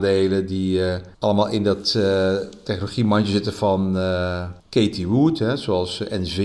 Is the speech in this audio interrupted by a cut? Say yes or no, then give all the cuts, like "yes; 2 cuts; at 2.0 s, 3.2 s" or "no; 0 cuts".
yes; 2 cuts; at 1.1 s, 4.6 s